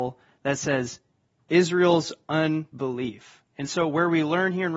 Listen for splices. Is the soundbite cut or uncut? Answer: uncut